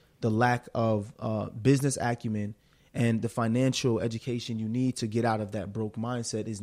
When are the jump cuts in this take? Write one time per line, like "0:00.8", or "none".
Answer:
none